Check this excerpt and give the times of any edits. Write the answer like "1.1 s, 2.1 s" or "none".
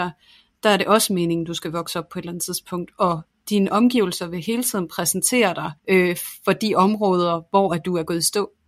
5.8 s